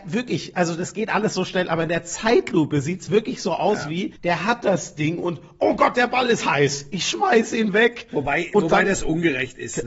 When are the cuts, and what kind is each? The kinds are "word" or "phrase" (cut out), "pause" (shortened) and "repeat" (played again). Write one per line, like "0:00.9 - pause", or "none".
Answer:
0:04.2 - pause